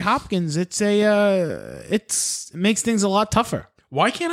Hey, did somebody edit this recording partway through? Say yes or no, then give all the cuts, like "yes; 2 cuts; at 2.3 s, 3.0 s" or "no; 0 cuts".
no; 0 cuts